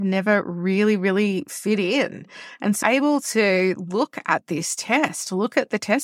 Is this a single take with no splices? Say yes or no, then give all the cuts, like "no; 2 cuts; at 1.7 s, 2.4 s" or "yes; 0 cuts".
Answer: no; 1 cut; at 2.8 s